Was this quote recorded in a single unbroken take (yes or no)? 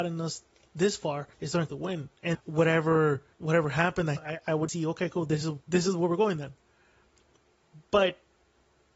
no